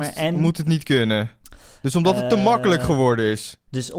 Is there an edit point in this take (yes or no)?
no